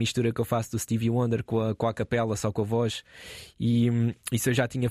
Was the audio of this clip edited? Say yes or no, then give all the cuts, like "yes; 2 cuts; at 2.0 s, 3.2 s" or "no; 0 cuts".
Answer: no; 0 cuts